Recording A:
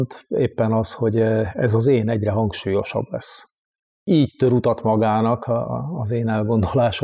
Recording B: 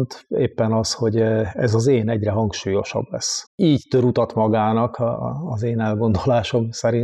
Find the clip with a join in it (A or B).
B